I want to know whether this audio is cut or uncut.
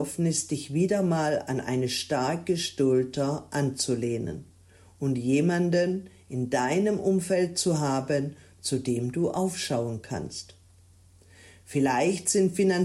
uncut